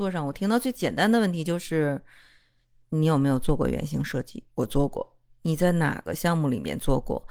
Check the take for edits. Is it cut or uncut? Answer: cut